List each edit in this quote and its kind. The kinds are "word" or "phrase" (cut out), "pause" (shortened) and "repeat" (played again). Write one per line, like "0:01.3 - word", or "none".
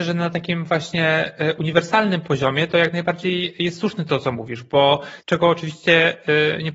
0:05.2 - pause

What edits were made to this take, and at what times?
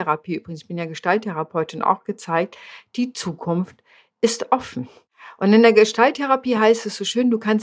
none

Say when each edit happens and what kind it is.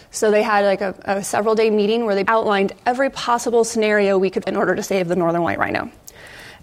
0:02.3 - word
0:04.4 - word

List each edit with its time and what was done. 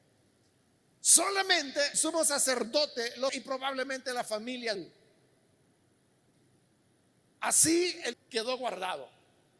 0:01.9 - word
0:03.3 - word
0:04.7 - word
0:08.1 - word

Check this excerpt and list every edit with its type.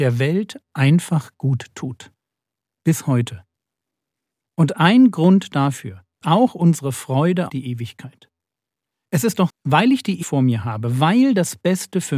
0:06.2 - word
0:07.5 - word
0:09.5 - word
0:10.2 - word

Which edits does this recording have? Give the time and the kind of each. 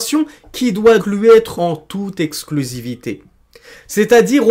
0:01.0 - word
0:01.5 - word

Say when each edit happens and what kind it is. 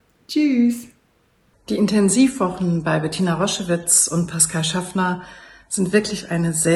none

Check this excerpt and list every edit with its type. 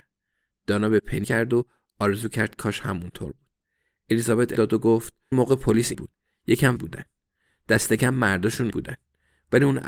0:01.2 - word
0:04.5 - word
0:05.3 - word
0:05.9 - word
0:06.8 - word
0:08.7 - word

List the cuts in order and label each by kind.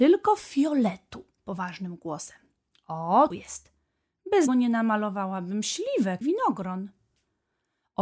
0:01.4 - word
0:03.3 - word
0:04.5 - word
0:06.2 - word

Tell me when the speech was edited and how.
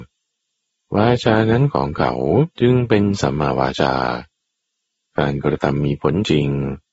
0:02.5 - pause

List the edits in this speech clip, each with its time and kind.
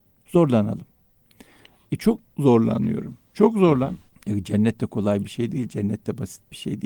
0:04.1 - pause

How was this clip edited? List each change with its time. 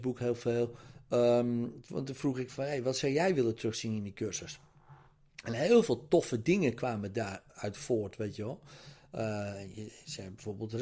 0:07.5 - word

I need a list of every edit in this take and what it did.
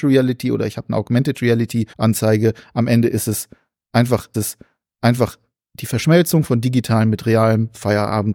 0:01.9 - pause
0:04.3 - repeat

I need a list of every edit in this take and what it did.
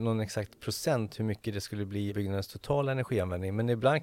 0:02.1 - word

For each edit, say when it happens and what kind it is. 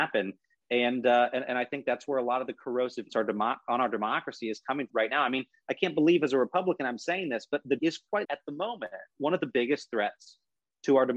0:03.1 - word
0:04.9 - word
0:07.8 - word
0:08.2 - word

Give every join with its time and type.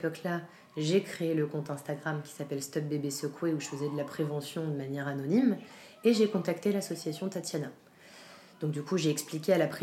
none

